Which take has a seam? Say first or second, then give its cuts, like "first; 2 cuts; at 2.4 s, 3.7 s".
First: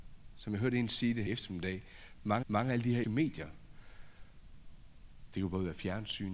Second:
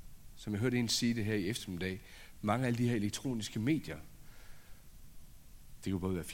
first; 3 cuts; at 1.3 s, 2.4 s, 3.0 s